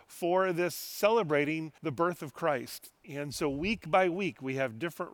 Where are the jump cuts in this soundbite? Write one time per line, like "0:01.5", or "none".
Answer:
0:01.8